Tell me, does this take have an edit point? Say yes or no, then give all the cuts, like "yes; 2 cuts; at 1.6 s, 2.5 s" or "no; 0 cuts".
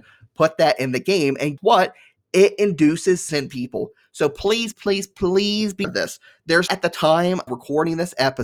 yes; 6 cuts; at 1.6 s, 3.3 s, 4.7 s, 5.8 s, 6.7 s, 7.5 s